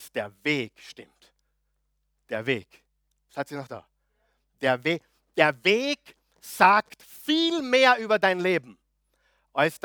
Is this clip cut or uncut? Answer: uncut